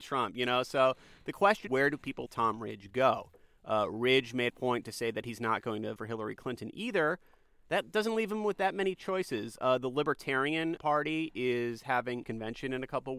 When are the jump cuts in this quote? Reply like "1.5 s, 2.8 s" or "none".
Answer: 1.7 s, 2.3 s, 4.5 s, 6.0 s, 10.8 s, 12.2 s